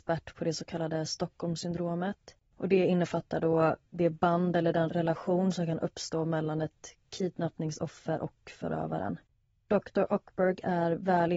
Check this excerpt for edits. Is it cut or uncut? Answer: cut